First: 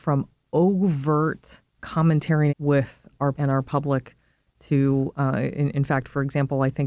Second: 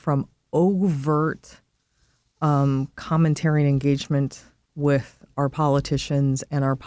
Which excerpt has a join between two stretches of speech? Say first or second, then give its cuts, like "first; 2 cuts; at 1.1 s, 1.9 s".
first; 3 cuts; at 1.8 s, 2.5 s, 3.3 s